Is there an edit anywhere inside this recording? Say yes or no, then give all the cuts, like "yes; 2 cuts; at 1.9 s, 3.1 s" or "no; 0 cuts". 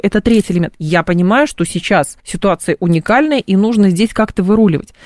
yes; 1 cut; at 2.2 s